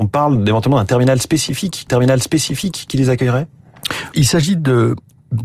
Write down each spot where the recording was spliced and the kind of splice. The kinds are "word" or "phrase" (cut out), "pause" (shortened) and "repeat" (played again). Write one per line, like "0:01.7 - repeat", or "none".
0:01.9 - repeat
0:04.1 - word